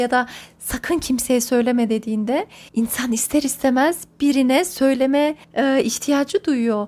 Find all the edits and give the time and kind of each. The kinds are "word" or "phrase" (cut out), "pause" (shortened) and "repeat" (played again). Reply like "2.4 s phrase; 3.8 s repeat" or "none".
2.7 s pause; 5.4 s pause